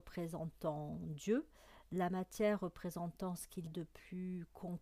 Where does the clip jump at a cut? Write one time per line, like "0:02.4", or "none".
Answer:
0:03.7